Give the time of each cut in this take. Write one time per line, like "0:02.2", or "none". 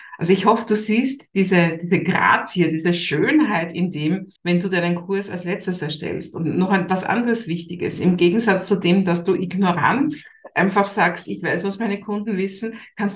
0:04.4